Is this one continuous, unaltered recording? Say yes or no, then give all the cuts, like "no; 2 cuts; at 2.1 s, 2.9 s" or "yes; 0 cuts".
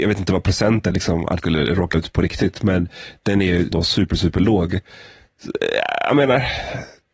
no; 4 cuts; at 0.9 s, 1.4 s, 1.9 s, 3.7 s